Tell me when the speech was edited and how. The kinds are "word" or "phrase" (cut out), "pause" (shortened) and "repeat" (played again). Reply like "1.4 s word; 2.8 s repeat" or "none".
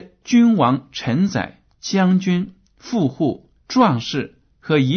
3.6 s pause